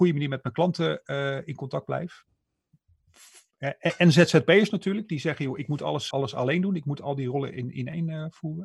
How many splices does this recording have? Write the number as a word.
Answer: one